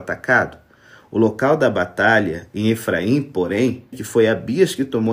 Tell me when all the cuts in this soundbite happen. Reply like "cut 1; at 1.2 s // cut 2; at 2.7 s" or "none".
cut 1; at 3.9 s

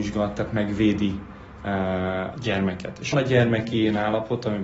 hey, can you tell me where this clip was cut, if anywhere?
cut 1; at 2.4 s // cut 2; at 3.1 s

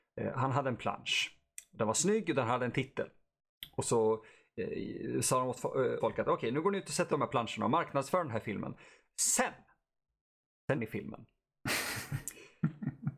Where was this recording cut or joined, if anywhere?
cut 1; at 6.0 s // cut 2; at 7.1 s // cut 3; at 10.7 s

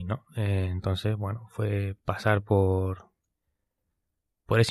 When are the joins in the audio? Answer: none

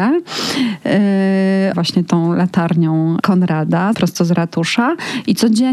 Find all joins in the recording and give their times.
cut 1; at 1.7 s // cut 2; at 3.2 s // cut 3; at 3.9 s

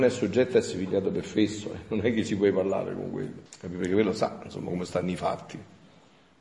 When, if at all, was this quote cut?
cut 1; at 3.5 s

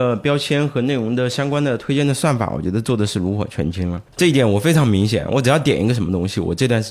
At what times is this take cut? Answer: cut 1; at 4.1 s

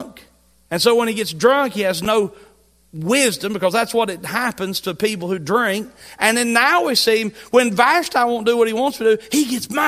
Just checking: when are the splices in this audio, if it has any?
none

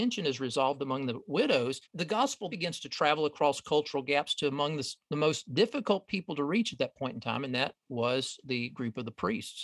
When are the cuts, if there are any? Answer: cut 1; at 1.8 s // cut 2; at 2.5 s

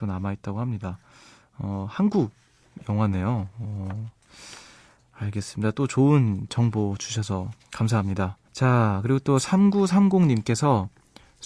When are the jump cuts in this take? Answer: cut 1; at 8.5 s

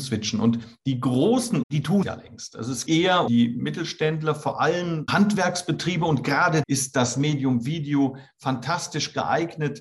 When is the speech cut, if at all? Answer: cut 1; at 1.6 s // cut 2; at 2.0 s // cut 3; at 2.9 s // cut 4; at 3.3 s // cut 5; at 5.1 s // cut 6; at 6.6 s

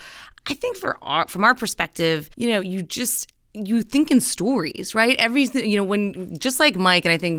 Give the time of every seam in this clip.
cut 1; at 2.3 s

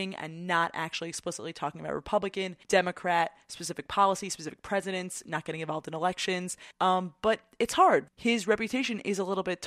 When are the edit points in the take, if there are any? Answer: cut 1; at 2.6 s // cut 2; at 6.7 s // cut 3; at 8.1 s

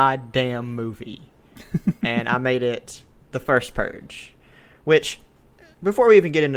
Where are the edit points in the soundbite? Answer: none

